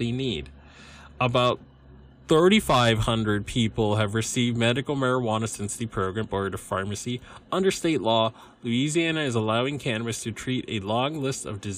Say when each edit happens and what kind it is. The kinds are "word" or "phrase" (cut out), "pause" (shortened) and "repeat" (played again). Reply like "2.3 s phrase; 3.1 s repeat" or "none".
6.2 s phrase